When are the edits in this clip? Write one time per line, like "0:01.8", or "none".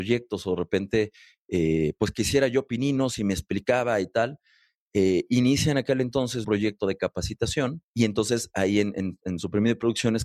0:06.4
0:07.8

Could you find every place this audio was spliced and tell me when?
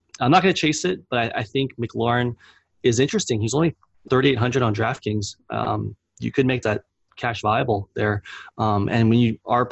0:04.1
0:06.6
0:07.1

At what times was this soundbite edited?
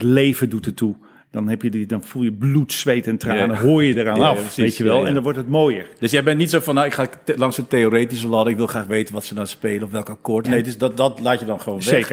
0:10.4

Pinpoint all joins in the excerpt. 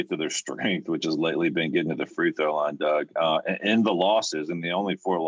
none

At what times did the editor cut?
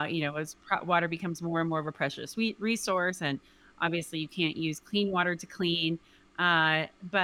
none

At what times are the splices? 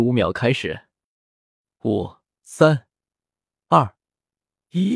0:02.3

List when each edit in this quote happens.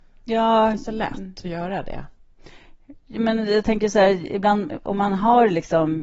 none

